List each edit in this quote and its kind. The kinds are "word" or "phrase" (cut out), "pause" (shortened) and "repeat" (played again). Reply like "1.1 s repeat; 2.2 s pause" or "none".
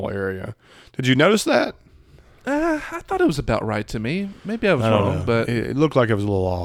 none